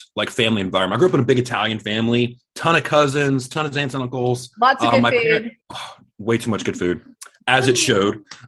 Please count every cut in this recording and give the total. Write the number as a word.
two